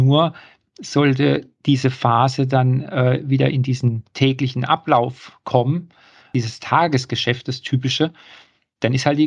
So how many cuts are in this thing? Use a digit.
0